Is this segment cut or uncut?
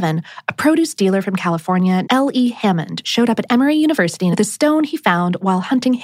cut